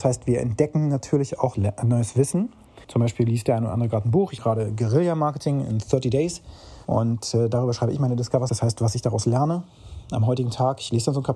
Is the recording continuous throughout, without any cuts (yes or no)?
no